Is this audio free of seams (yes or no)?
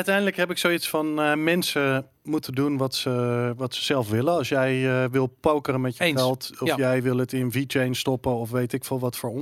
yes